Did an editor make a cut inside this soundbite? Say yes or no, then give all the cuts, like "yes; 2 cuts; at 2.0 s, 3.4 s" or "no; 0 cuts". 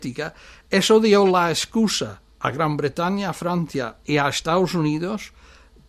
yes; 1 cut; at 2.3 s